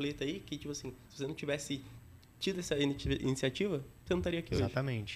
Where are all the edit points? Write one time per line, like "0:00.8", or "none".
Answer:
none

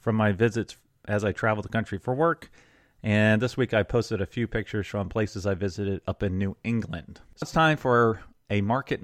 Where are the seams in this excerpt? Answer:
0:07.4

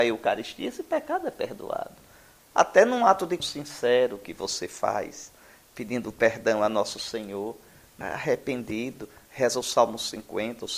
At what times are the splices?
0:03.4
0:08.0

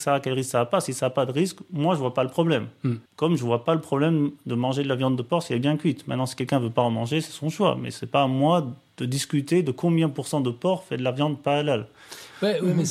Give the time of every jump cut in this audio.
0:03.1

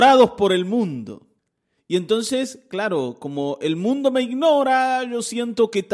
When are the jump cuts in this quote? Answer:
0:01.4

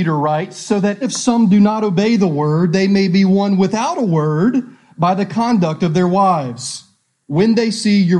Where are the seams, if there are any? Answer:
0:01.0

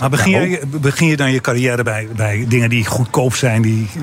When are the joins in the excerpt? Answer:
none

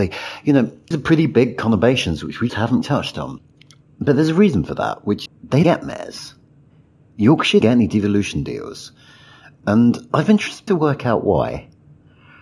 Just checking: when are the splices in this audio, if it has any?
0:00.9
0:02.5
0:02.8
0:05.3
0:05.6
0:07.6
0:10.7

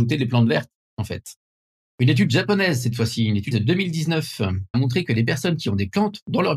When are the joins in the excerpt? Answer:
0:03.5
0:04.7

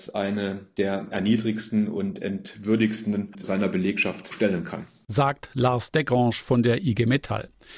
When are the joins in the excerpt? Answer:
0:03.3
0:04.3

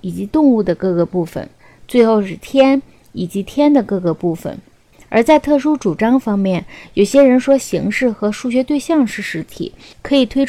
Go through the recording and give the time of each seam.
none

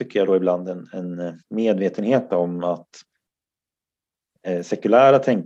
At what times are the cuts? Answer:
0:01.4

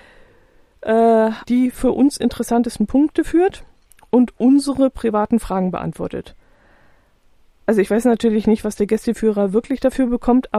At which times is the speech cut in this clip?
0:01.4

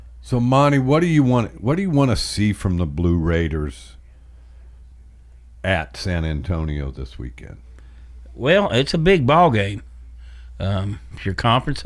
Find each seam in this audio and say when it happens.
none

